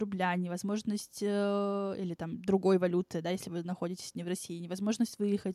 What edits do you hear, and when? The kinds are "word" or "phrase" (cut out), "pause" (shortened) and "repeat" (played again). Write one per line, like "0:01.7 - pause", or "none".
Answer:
none

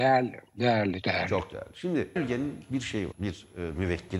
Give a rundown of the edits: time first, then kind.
0:01.0 - word
0:02.2 - word
0:03.1 - word

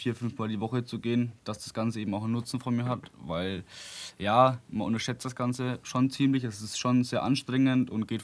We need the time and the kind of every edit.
none

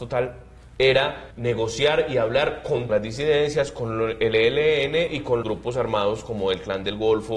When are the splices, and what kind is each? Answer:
0:01.3 - pause
0:02.9 - phrase
0:05.4 - word

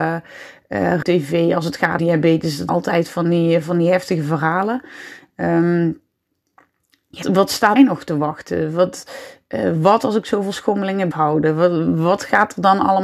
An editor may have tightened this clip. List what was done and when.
0:01.0 - word
0:02.0 - word
0:02.7 - word
0:07.2 - word
0:07.8 - word
0:11.1 - word

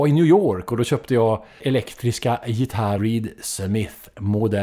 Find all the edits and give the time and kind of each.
0:01.6 - word
0:03.0 - phrase

